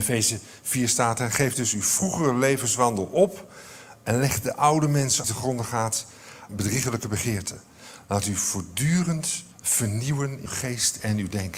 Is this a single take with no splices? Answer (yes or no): no